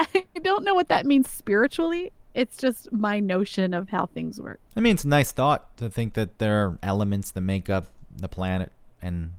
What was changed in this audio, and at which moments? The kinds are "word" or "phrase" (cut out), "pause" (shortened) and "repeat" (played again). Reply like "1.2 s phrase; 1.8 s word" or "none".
4.7 s pause